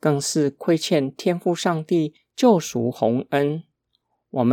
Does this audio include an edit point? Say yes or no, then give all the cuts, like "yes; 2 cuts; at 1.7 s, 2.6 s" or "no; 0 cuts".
no; 0 cuts